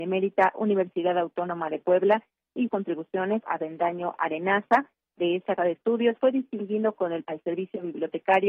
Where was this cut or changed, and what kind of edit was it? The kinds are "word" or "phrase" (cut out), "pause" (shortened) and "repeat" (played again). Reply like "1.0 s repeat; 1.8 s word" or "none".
2.7 s word; 3.4 s word; 5.6 s word; 7.2 s word